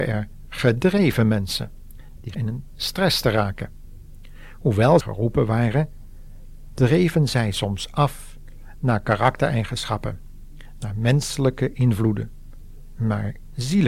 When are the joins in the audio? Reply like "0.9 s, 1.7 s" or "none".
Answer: 2.3 s, 5.0 s